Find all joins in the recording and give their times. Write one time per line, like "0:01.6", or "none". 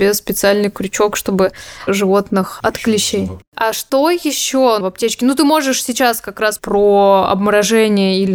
0:01.9
0:03.5
0:04.8
0:06.6